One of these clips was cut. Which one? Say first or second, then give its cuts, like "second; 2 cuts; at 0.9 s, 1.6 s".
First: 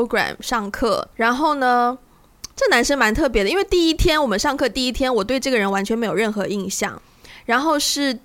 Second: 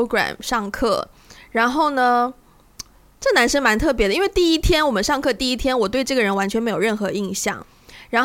first; 2 cuts; at 1.1 s, 2.5 s